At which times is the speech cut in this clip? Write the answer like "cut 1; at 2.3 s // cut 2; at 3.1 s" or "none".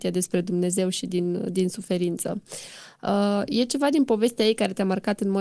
none